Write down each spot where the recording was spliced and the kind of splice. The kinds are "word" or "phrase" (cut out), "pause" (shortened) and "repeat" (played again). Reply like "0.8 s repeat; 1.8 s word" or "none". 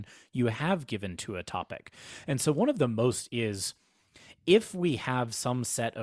3.3 s phrase